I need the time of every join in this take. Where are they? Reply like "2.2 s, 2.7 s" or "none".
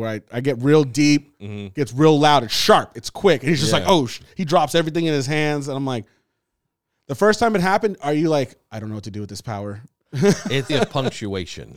10.7 s